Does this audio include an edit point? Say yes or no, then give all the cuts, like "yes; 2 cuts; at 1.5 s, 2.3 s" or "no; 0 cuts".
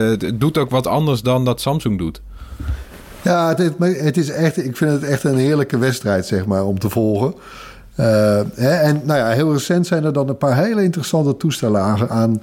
no; 0 cuts